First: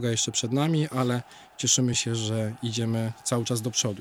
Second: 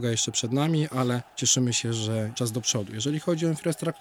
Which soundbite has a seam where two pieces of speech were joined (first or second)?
second